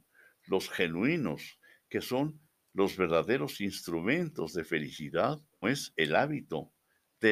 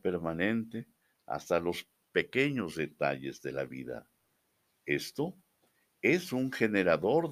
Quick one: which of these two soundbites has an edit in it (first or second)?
first